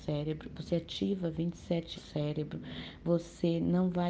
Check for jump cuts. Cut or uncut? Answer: cut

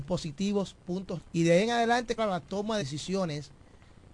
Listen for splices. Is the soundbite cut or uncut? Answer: cut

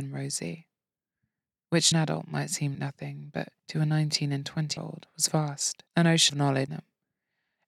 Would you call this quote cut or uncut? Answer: cut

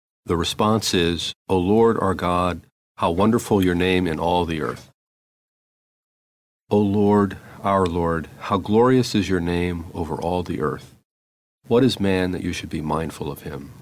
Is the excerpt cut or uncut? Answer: uncut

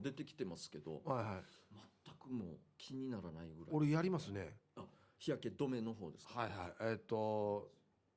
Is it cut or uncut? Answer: uncut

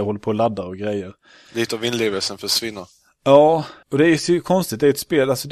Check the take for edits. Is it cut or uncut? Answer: cut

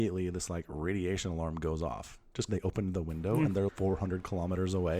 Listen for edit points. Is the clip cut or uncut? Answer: cut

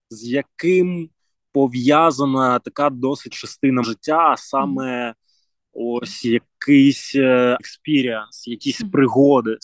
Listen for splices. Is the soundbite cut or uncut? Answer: cut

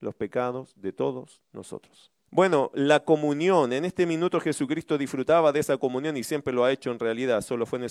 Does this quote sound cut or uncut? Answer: cut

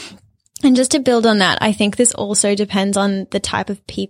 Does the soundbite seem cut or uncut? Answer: uncut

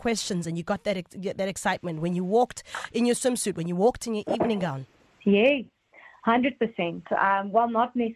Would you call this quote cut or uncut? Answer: uncut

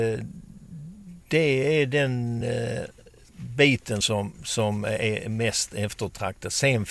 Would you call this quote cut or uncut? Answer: uncut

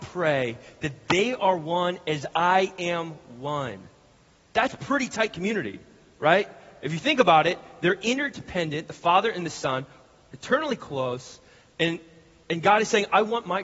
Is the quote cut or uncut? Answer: uncut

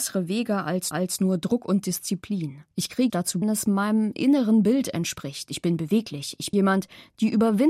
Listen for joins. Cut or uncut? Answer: cut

